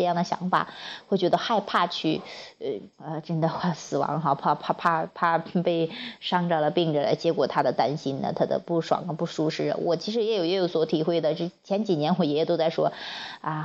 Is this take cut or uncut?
cut